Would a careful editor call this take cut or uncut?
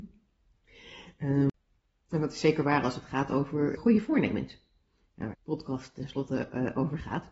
cut